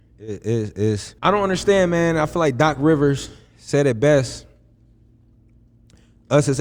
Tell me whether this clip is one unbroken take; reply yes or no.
no